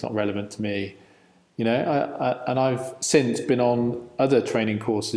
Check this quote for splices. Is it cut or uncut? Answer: uncut